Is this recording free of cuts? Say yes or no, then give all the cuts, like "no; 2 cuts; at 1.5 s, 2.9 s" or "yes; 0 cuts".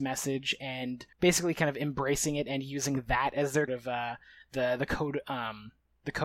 no; 2 cuts; at 1.1 s, 3.7 s